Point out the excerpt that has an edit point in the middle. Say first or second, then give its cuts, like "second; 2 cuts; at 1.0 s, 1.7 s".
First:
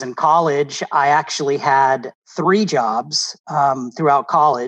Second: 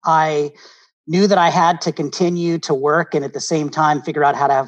first; 1 cut; at 3.4 s